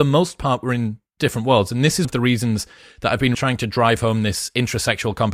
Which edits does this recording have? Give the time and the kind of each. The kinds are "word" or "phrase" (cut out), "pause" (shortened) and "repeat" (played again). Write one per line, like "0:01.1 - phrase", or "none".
0:02.0 - word
0:03.3 - word